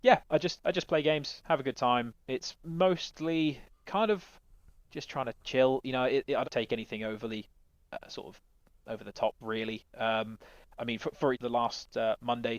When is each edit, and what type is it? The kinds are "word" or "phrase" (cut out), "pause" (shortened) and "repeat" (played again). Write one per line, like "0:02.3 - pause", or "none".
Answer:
0:06.4 - word
0:11.3 - word